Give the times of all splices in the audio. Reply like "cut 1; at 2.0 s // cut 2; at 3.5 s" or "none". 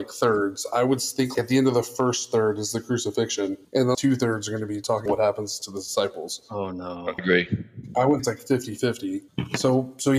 cut 1; at 1.3 s // cut 2; at 3.9 s // cut 3; at 5.1 s // cut 4; at 7.2 s // cut 5; at 8.2 s